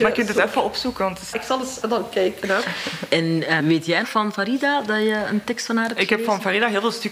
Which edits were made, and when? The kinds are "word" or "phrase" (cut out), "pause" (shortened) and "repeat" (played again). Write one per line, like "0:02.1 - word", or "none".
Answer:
0:01.3 - word
0:01.8 - word
0:03.6 - word
0:04.0 - word